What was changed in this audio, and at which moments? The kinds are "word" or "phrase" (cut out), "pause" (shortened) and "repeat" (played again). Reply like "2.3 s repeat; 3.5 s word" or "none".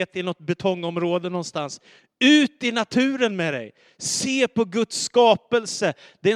none